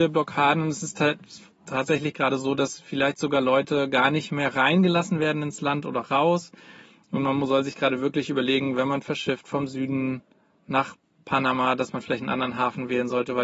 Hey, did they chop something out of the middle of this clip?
no; 0 cuts

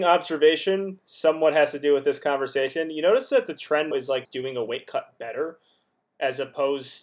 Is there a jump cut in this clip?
yes; 2 cuts; at 3.9 s, 4.2 s

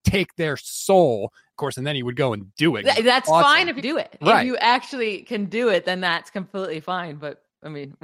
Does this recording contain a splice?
yes; 3 cuts; at 2.8 s, 3.8 s, 4.2 s

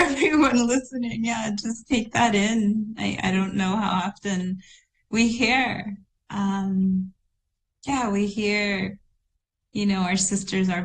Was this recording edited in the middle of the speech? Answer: no; 0 cuts

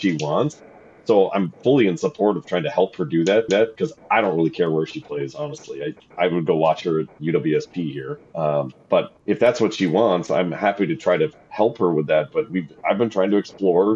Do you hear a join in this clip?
yes; 3 cuts; at 3.5 s, 8.2 s, 9.2 s

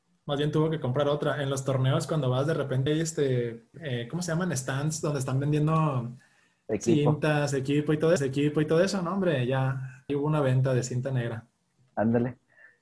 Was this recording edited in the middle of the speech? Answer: yes; 4 cuts; at 2.9 s, 3.7 s, 8.2 s, 10.1 s

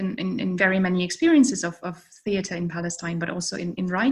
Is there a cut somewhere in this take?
no; 0 cuts

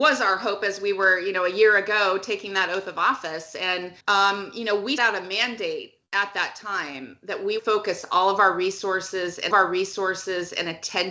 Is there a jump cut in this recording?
yes; 5 cuts; at 4.0 s, 5.0 s, 6.0 s, 7.6 s, 9.5 s

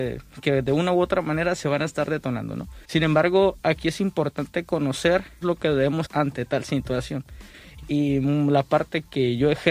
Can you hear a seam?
yes; 3 cuts; at 2.8 s, 5.4 s, 6.1 s

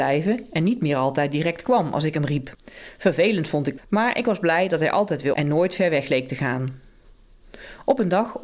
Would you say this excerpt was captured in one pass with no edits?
no; 2 cuts; at 3.8 s, 5.3 s

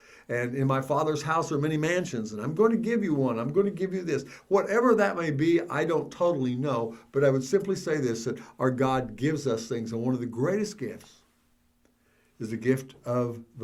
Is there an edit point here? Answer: no; 0 cuts

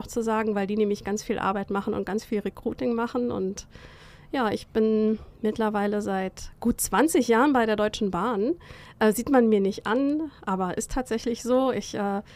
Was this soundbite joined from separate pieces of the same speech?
no; 0 cuts

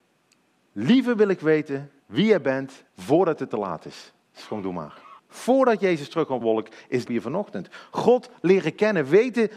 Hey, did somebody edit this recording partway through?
yes; 6 cuts; at 2.0 s, 2.9 s, 4.2 s, 5.2 s, 6.4 s, 7.1 s

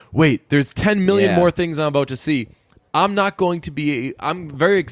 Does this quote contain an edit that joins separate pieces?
no; 0 cuts

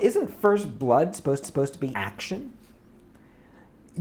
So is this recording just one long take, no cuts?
no; 2 cuts; at 1.4 s, 1.9 s

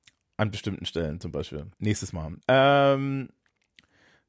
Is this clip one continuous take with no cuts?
no; 2 cuts; at 1.7 s, 2.4 s

